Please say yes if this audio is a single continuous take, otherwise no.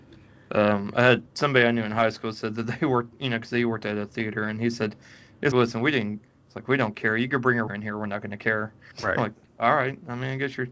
no